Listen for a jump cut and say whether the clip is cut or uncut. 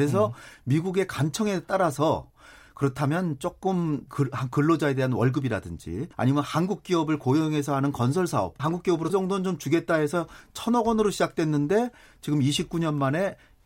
cut